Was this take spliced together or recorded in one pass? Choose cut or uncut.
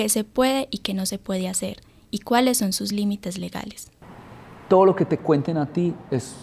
uncut